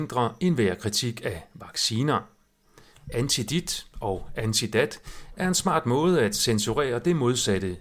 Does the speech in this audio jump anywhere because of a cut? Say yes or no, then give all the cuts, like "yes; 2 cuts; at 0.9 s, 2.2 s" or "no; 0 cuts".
no; 0 cuts